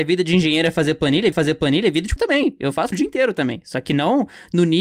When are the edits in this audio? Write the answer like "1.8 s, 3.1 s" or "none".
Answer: 1.3 s, 2.2 s, 2.9 s